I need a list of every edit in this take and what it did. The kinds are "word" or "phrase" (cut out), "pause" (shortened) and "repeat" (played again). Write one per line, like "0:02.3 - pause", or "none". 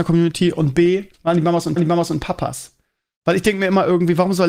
0:01.1 - pause
0:01.8 - repeat